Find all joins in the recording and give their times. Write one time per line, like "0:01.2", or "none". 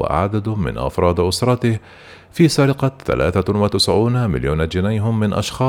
none